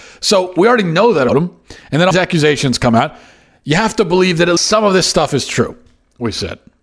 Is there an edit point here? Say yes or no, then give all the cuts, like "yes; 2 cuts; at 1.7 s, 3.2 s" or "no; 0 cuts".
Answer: yes; 3 cuts; at 1.3 s, 2.1 s, 4.6 s